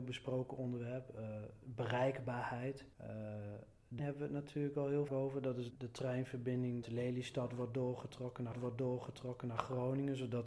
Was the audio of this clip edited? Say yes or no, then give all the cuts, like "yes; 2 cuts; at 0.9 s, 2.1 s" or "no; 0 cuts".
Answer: yes; 6 cuts; at 2.9 s, 4.0 s, 5.1 s, 5.7 s, 6.8 s, 8.5 s